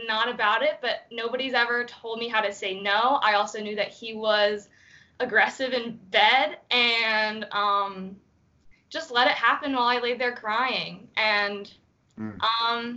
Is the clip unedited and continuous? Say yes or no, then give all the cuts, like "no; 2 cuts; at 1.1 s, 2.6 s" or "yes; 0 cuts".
yes; 0 cuts